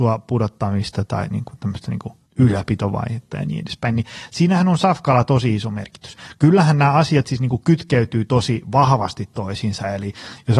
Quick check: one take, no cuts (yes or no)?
no